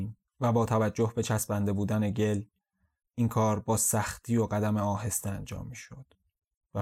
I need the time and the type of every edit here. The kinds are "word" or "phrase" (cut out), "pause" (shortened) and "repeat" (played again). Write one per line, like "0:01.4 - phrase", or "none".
none